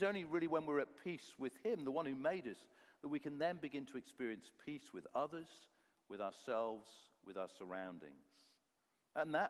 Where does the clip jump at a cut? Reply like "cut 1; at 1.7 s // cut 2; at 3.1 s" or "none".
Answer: none